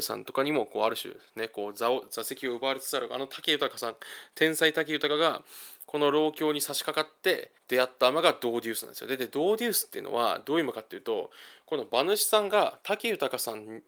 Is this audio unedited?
no; 1 cut; at 7.6 s

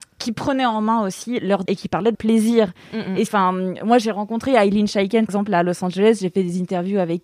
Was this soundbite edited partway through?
yes; 4 cuts; at 1.7 s, 2.1 s, 3.3 s, 5.3 s

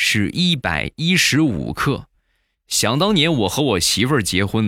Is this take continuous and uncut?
yes; 0 cuts

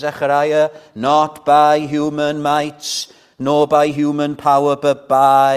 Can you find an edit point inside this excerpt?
no; 0 cuts

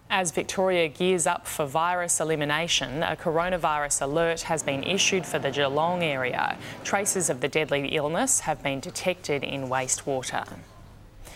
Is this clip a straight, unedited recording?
yes; 0 cuts

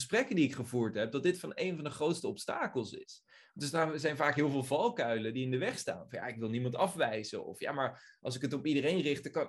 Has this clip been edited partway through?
no; 0 cuts

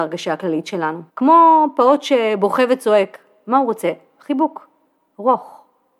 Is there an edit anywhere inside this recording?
yes; 1 cut; at 1.1 s

